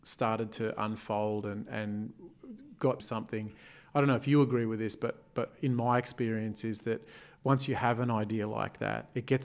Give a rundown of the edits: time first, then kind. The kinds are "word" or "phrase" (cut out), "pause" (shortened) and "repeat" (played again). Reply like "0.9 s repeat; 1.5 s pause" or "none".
3.0 s phrase